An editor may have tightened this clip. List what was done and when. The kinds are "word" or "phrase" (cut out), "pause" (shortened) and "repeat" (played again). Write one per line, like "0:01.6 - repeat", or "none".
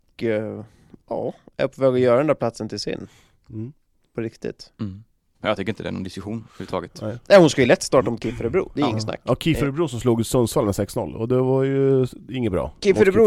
none